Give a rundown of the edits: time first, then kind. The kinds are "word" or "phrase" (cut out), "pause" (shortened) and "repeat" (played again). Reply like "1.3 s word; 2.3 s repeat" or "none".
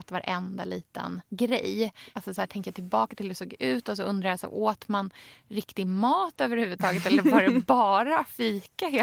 1.2 s pause